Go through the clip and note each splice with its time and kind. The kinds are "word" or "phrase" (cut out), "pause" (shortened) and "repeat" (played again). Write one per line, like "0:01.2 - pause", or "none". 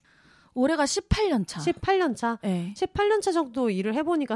none